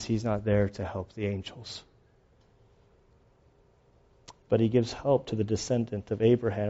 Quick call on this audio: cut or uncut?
uncut